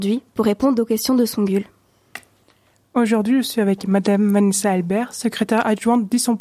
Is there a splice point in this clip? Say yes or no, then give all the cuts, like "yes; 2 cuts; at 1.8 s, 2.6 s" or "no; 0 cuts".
no; 0 cuts